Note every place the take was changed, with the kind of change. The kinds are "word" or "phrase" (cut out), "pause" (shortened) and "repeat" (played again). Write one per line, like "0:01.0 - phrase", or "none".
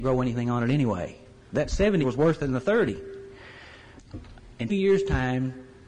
0:02.0 - word
0:04.7 - word

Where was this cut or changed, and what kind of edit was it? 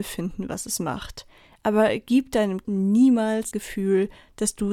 0:02.6 - word
0:03.5 - word

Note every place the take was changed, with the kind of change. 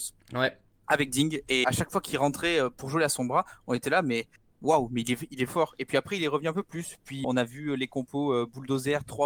0:01.6 - word
0:05.5 - word
0:07.2 - word

